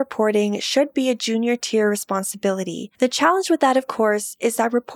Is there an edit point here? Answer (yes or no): yes